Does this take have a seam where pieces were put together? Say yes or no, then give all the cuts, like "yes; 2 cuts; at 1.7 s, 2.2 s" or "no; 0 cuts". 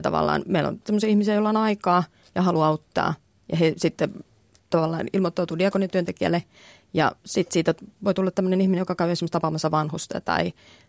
no; 0 cuts